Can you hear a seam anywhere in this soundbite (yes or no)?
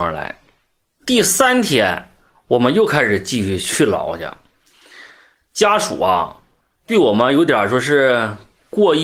no